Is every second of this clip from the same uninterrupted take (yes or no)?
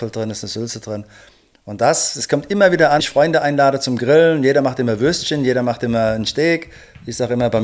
no